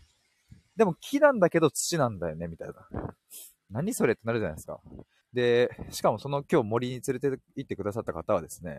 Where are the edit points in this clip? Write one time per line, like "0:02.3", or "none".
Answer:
0:05.2

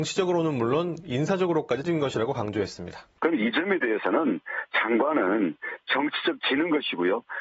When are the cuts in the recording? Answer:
0:01.8
0:03.2
0:06.4

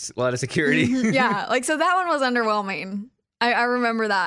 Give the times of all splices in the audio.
none

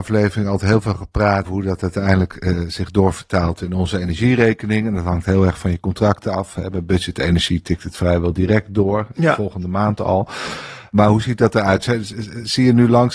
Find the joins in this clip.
0:01.4

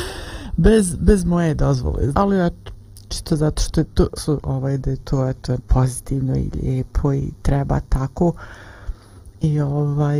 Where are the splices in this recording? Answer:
0:02.1
0:04.2
0:05.6

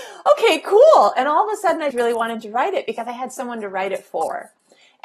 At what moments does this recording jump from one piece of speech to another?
0:01.9

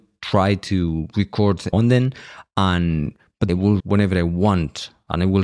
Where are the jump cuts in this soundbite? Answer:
0:01.7
0:03.5
0:03.8

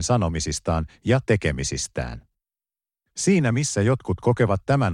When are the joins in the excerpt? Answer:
none

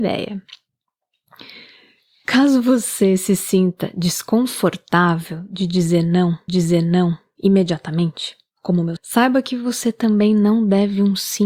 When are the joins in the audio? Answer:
0:06.5
0:09.0

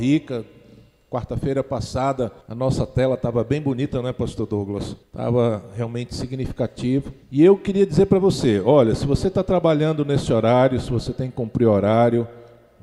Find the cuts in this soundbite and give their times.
0:02.4
0:05.0
0:07.2

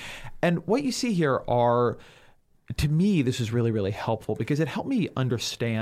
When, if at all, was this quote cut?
none

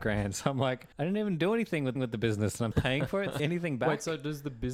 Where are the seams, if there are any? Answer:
0:00.9
0:02.0
0:02.7
0:03.4

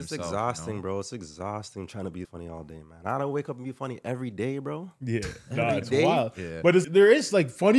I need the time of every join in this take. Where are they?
0:02.2
0:06.8

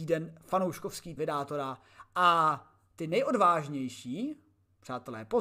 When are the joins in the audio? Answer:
0:01.2

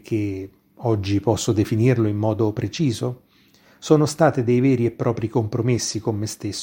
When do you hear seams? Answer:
none

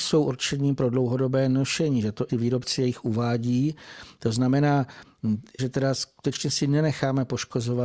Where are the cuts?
0:02.3
0:05.6

